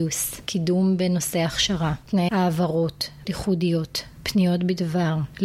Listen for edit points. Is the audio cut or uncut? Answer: cut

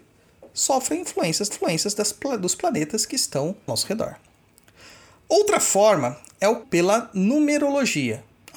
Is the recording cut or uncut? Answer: cut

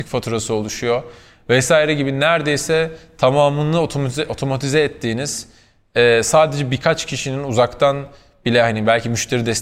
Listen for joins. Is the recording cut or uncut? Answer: uncut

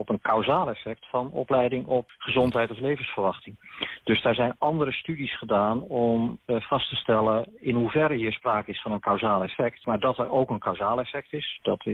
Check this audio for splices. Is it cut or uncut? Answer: uncut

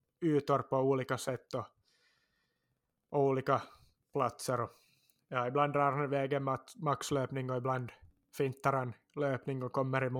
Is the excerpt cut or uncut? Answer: uncut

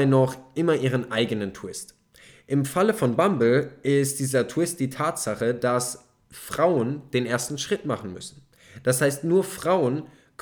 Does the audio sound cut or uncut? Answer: uncut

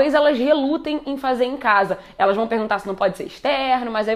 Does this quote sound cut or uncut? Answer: uncut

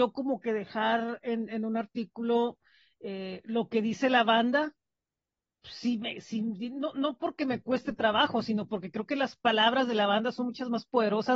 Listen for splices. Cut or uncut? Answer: uncut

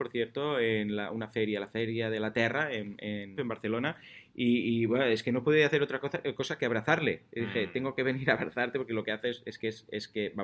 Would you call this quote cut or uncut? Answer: cut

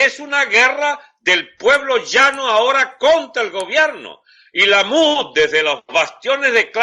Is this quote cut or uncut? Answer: uncut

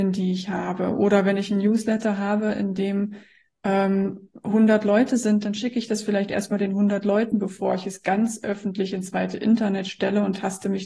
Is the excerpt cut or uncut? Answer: uncut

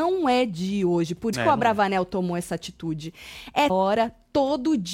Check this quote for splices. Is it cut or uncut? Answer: cut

